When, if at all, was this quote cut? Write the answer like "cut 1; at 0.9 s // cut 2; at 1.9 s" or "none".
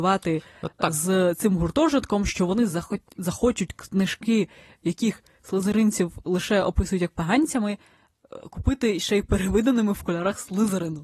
none